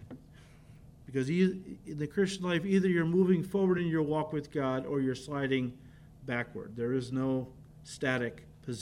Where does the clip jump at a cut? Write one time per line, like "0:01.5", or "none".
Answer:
none